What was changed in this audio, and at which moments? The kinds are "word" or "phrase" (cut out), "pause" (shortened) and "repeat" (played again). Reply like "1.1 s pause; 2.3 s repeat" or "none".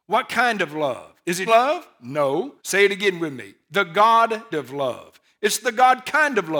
1.5 s word; 2.6 s pause; 4.5 s word